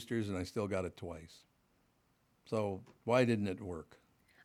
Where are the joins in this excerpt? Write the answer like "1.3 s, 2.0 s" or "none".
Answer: none